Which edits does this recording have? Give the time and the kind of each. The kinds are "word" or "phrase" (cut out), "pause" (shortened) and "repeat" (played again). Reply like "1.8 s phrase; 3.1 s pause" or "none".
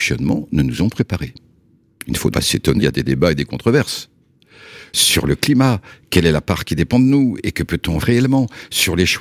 2.3 s word; 2.8 s word; 8.0 s word